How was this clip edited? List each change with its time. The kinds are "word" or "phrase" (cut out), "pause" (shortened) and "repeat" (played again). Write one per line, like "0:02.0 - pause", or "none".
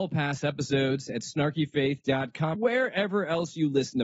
0:02.5 - word